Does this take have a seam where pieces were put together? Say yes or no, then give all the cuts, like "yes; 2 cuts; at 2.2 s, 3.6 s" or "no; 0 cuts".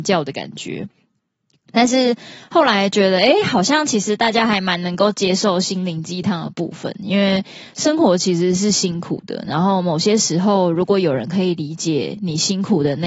no; 0 cuts